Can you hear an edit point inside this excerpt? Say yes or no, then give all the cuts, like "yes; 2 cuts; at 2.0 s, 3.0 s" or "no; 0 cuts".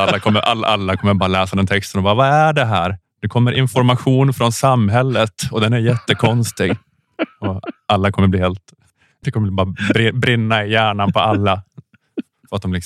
no; 0 cuts